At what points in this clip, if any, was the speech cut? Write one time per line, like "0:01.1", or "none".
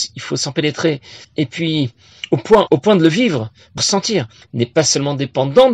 0:01.2
0:02.7
0:03.8
0:04.4